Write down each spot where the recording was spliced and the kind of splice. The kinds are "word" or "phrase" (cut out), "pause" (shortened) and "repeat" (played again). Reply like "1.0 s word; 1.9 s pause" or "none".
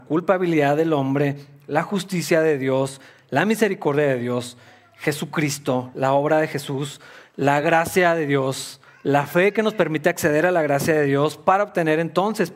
none

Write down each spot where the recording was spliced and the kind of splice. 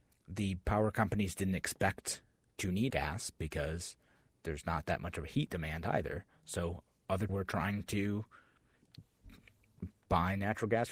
2.9 s phrase; 7.3 s word

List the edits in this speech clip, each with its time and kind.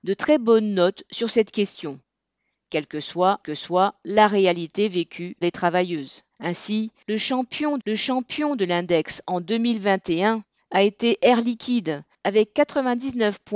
3.4 s repeat; 5.4 s word; 6.3 s pause; 7.8 s repeat

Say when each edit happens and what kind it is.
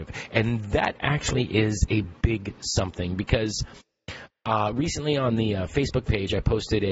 none

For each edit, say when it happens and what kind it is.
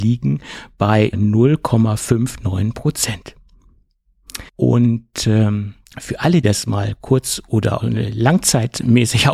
1.1 s word; 4.5 s pause; 5.8 s pause; 6.4 s word; 7.8 s word

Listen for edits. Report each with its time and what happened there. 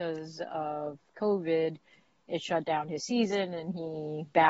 none

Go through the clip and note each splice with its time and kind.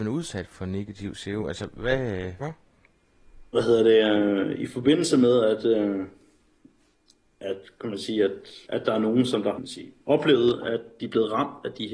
2.4 s phrase; 8.6 s pause; 9.6 s phrase; 10.0 s pause

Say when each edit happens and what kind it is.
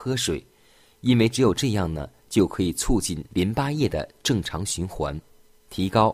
3.3 s pause

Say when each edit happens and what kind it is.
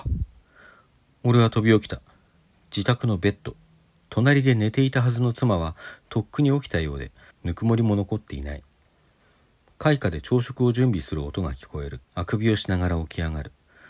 7.3 s pause; 12.0 s pause

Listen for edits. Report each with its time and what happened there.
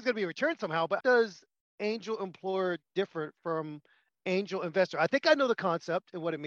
1.0 s word

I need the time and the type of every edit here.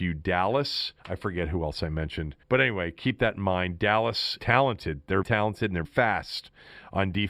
1.0 s pause; 2.4 s pause; 4.4 s word; 5.2 s word; 5.8 s word

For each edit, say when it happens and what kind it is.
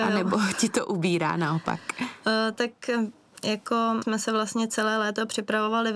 4.0 s word

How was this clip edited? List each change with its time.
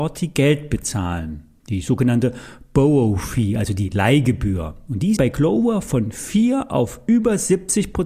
5.2 s word

